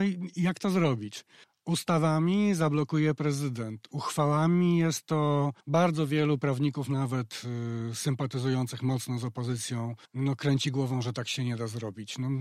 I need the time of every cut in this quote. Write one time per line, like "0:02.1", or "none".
0:01.4
0:05.6
0:10.1